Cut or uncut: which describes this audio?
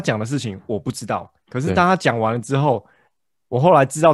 uncut